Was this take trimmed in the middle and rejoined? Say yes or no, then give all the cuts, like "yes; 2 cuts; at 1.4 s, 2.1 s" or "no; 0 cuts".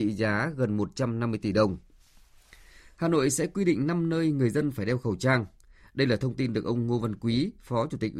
no; 0 cuts